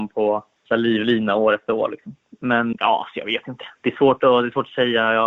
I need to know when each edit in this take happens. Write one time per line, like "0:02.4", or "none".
0:02.7